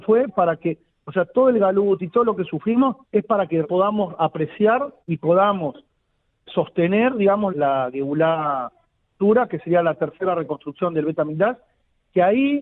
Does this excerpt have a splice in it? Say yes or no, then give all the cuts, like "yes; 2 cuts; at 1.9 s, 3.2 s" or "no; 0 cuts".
yes; 5 cuts; at 3.0 s, 3.6 s, 5.0 s, 6.5 s, 7.5 s